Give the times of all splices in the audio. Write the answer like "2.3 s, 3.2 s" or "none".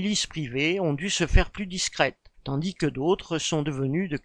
2.3 s

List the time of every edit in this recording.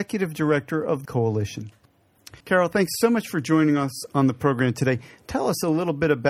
1.0 s, 2.4 s

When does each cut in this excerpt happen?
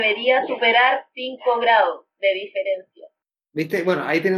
2.1 s

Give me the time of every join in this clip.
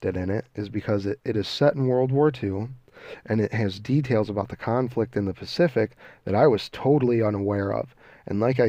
none

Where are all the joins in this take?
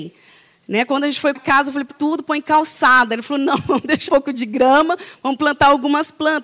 1.4 s, 1.9 s, 4.1 s

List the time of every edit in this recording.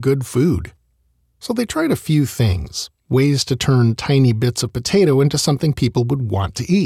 none

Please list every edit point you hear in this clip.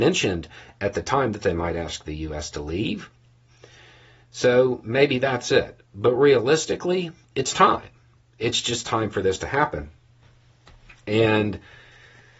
none

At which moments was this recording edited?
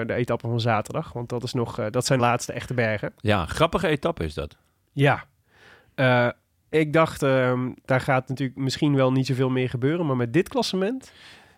2.2 s

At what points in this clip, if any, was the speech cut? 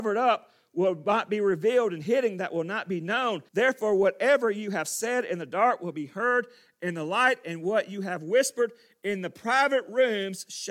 3.5 s

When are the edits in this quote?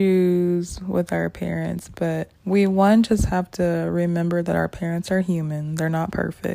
2.4 s

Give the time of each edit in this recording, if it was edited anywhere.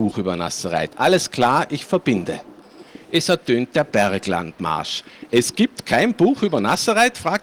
none

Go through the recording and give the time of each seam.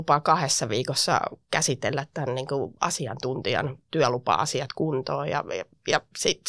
none

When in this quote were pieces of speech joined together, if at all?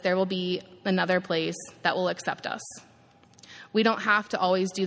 none

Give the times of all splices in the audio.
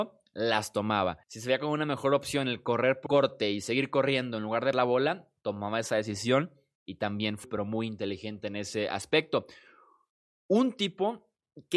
1.2 s, 3.1 s, 4.7 s, 7.4 s

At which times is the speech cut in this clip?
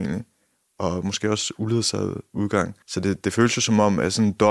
2.8 s, 3.2 s

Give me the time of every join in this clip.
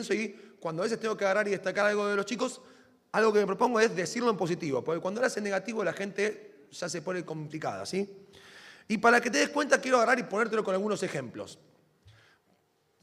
none

